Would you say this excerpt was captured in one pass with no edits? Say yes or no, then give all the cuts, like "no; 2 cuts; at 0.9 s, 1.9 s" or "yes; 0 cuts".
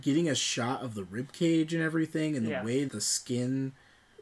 no; 1 cut; at 2.9 s